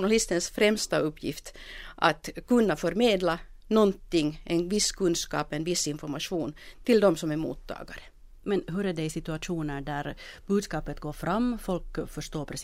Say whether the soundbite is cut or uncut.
uncut